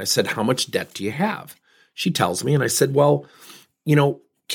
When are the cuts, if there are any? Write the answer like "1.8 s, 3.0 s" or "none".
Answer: none